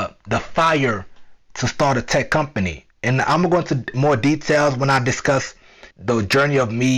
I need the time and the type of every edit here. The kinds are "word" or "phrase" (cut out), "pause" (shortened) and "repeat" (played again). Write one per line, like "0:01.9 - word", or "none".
0:02.9 - pause
0:05.9 - pause